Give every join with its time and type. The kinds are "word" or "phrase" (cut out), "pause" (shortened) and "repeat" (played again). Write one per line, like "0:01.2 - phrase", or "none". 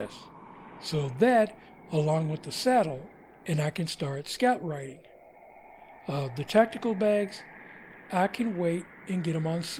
none